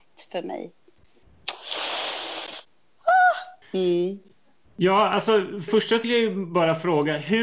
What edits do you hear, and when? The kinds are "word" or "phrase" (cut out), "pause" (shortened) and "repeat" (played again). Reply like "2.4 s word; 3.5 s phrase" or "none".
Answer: 3.6 s pause; 5.7 s phrase; 6.0 s word